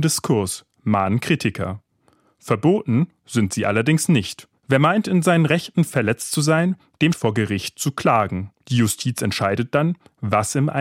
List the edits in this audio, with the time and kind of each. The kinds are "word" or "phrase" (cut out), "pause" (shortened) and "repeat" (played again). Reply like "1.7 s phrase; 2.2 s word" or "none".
4.6 s pause; 7.1 s phrase; 8.6 s pause